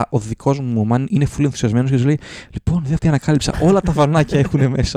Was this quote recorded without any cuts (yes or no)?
no